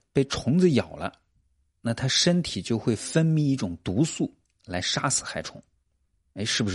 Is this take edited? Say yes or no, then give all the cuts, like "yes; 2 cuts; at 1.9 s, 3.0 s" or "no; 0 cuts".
no; 0 cuts